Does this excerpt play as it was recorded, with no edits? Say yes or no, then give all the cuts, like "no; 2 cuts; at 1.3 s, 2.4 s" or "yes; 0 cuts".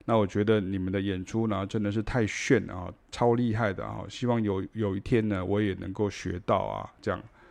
no; 1 cut; at 3.0 s